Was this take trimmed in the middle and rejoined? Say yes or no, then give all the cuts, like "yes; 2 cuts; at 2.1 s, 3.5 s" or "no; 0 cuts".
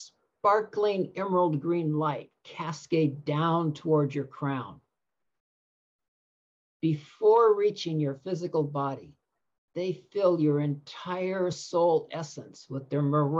no; 0 cuts